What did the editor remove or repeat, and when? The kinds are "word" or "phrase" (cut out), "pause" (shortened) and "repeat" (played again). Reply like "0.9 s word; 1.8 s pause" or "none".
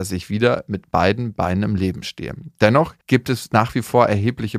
3.0 s pause